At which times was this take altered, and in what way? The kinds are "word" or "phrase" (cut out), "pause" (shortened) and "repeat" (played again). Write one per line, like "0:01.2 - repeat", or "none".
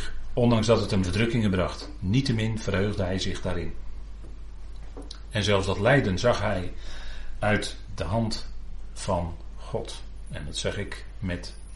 0:01.0 - phrase